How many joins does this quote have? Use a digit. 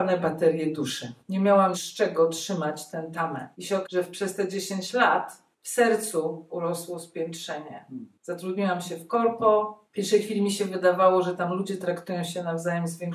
8